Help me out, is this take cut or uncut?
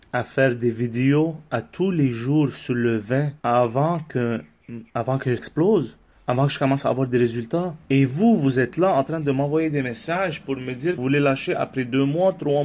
cut